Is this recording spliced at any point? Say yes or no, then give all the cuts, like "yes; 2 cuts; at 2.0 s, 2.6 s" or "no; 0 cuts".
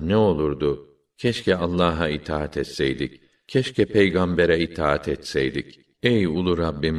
no; 0 cuts